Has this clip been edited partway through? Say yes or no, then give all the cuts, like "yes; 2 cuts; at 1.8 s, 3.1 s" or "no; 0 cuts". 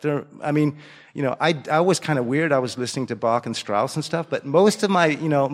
no; 0 cuts